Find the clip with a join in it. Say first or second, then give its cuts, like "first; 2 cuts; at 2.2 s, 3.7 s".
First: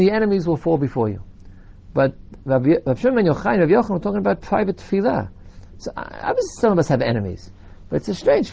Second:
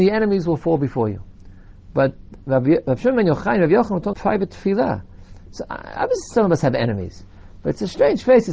second; 1 cut; at 4.1 s